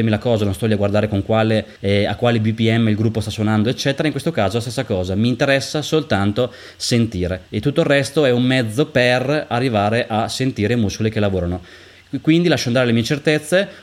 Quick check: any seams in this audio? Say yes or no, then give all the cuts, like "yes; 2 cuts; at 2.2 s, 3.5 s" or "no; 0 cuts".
yes; 2 cuts; at 1.8 s, 7.4 s